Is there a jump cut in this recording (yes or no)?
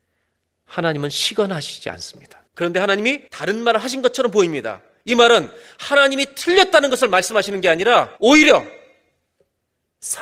yes